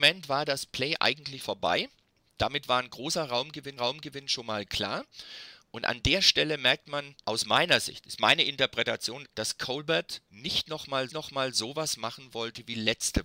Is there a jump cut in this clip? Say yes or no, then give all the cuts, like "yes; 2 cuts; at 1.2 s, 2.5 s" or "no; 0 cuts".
yes; 6 cuts; at 1.4 s, 3.8 s, 7.2 s, 9.2 s, 10.3 s, 11.1 s